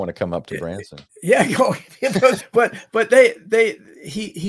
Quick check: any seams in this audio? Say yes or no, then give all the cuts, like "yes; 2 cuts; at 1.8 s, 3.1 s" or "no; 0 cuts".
yes; 2 cuts; at 1.1 s, 2.4 s